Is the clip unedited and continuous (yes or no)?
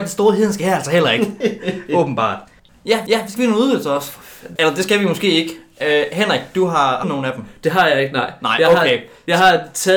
no